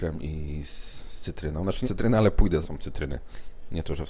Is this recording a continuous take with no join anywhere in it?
no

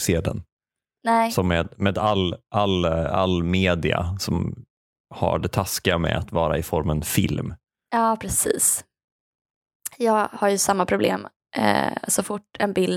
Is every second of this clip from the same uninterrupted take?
yes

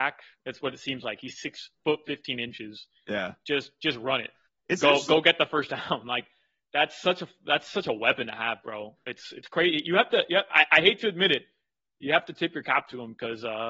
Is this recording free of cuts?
yes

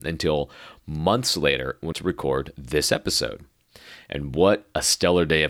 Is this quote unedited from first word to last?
no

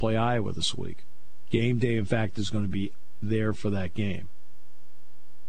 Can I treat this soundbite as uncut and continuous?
yes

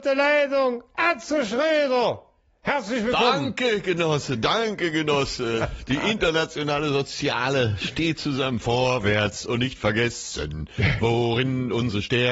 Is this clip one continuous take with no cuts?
yes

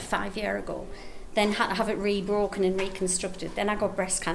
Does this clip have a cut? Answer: no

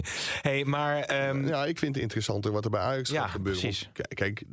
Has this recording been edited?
yes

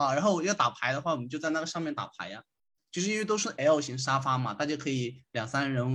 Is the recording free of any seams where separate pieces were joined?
yes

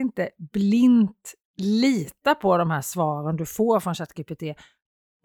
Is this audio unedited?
yes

